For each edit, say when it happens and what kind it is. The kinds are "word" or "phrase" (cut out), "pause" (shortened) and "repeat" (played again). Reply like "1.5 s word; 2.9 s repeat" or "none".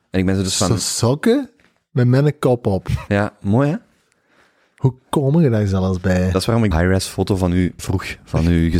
6.7 s word; 7.8 s word

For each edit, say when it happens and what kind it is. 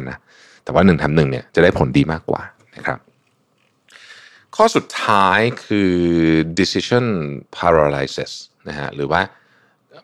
7.5 s pause

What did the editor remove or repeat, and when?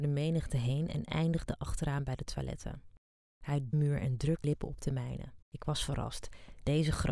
3.7 s phrase; 4.4 s word; 5.4 s pause

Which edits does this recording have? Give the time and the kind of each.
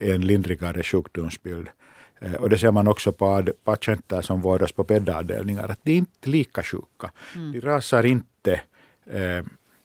none

